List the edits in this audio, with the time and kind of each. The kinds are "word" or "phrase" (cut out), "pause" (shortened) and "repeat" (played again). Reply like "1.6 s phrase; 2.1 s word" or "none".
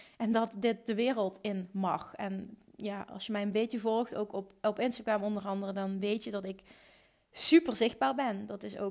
none